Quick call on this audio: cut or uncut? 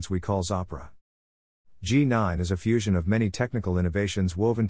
uncut